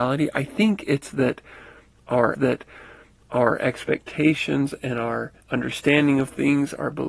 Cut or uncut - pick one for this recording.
cut